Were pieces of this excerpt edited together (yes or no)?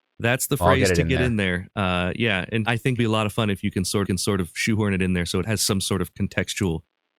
yes